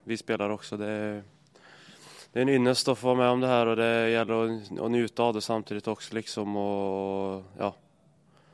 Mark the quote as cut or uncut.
uncut